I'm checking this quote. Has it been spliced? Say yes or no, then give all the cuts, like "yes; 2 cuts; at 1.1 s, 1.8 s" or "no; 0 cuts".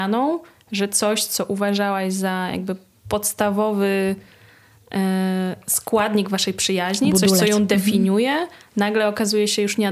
no; 0 cuts